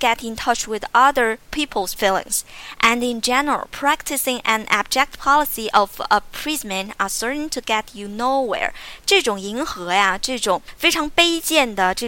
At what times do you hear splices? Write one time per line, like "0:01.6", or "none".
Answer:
0:01.4